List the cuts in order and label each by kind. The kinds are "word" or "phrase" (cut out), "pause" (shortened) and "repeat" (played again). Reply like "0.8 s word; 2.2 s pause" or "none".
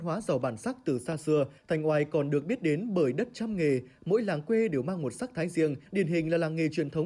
1.6 s pause; 5.9 s pause